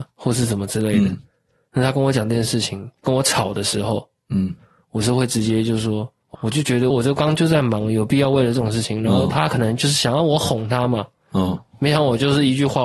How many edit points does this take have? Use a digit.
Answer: 3